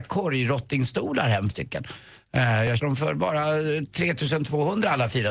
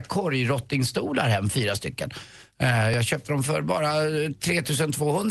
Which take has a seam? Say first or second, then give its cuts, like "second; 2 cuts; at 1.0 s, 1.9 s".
first; 2 cuts; at 1.5 s, 2.8 s